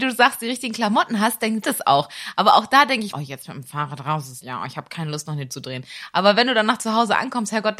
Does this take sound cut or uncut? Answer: cut